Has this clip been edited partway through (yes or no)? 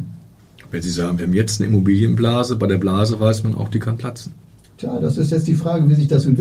no